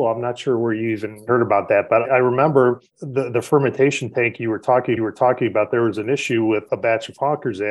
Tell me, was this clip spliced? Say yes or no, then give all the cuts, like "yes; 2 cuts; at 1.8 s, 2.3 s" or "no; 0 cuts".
yes; 4 cuts; at 2.0 s, 2.9 s, 5.0 s, 6.7 s